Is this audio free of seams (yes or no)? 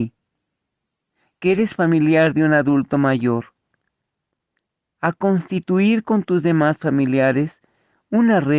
yes